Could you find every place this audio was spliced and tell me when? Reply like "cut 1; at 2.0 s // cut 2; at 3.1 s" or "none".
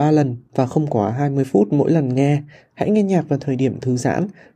none